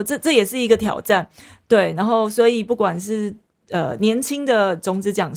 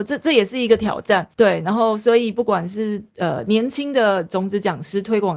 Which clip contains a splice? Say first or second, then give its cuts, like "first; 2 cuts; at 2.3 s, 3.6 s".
second; 2 cuts; at 1.3 s, 3.1 s